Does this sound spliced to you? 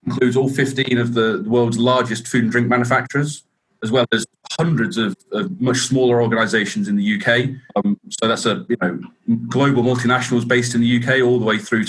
no; 0 cuts

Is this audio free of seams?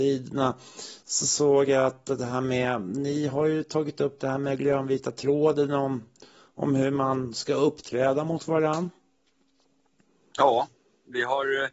yes; 0 cuts

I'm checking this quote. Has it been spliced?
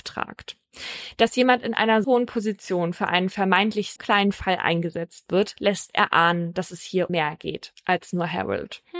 yes; 3 cuts; at 2.0 s, 4.0 s, 7.1 s

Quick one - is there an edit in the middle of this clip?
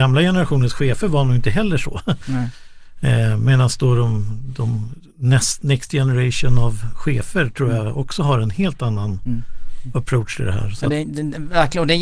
no; 0 cuts

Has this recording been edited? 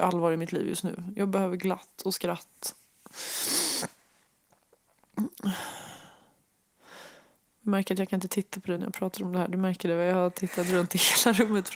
no; 0 cuts

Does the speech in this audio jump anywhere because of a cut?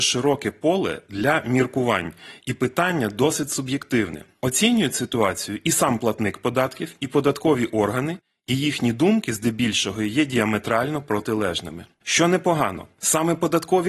no; 0 cuts

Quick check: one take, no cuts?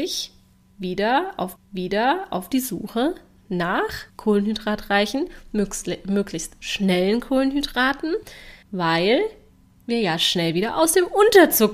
no; 3 cuts; at 1.6 s, 4.1 s, 8.6 s

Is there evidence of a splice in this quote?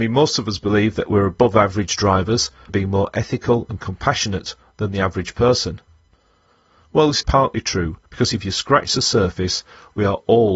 yes; 3 cuts; at 2.7 s, 7.2 s, 8.1 s

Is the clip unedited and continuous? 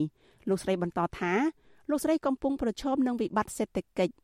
yes; 0 cuts

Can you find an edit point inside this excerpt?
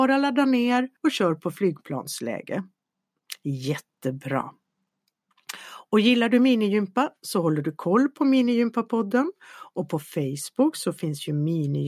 yes; 1 cut; at 1.0 s

